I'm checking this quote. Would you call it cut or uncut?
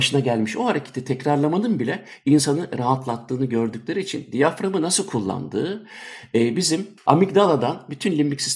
uncut